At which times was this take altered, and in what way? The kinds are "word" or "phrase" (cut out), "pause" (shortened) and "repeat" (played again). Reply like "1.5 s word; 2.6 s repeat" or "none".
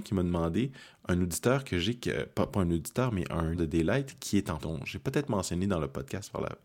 2.5 s word; 3.5 s word; 4.6 s word